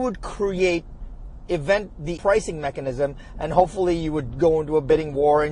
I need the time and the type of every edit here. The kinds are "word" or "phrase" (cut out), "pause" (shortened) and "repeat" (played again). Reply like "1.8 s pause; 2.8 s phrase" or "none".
2.2 s word